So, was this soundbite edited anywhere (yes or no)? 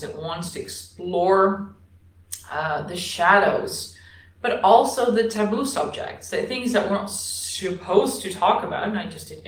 no